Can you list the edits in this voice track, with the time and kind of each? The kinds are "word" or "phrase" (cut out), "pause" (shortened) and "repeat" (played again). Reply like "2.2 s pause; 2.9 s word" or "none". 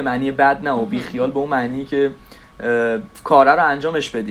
none